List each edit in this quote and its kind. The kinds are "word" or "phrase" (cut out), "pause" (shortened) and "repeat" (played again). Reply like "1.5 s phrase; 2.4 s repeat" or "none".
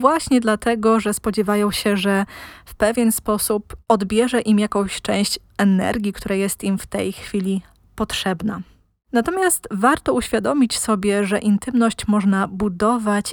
none

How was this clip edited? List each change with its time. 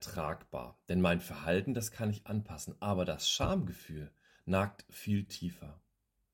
none

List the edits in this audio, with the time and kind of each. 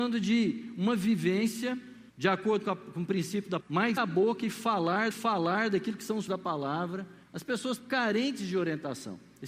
2.1 s pause; 3.6 s word; 4.0 s word; 5.1 s repeat; 6.3 s word; 7.2 s pause; 7.8 s word

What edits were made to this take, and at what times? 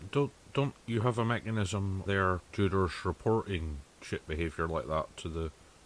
2.1 s word; 2.4 s word; 3.9 s word

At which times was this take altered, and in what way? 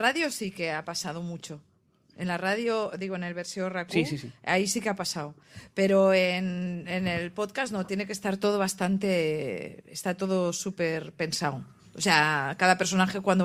none

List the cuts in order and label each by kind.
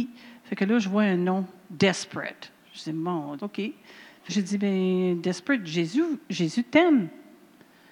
3.4 s word; 4.3 s word; 6.2 s pause

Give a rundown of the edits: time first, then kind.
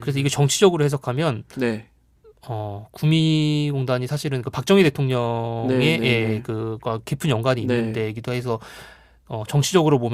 none

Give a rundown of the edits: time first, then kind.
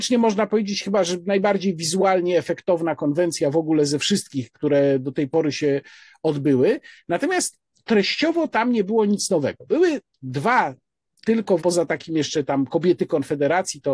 11.6 s word

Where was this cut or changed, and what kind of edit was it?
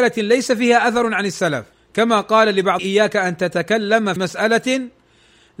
1.7 s pause; 2.8 s word; 4.2 s word

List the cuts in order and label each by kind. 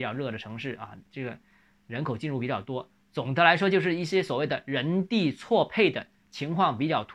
1.0 s pause

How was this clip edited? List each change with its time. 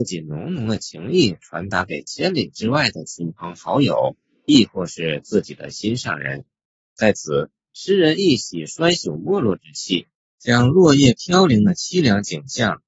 6.6 s pause; 10.2 s pause

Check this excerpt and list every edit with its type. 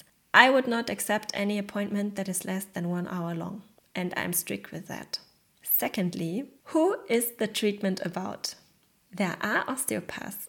none

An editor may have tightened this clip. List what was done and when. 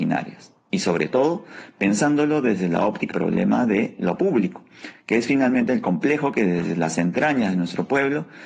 3.1 s word

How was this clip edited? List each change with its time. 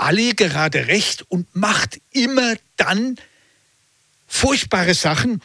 none

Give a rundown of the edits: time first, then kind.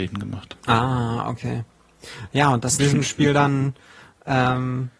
2.8 s phrase

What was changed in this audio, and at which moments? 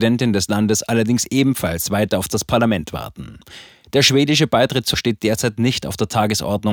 4.9 s word

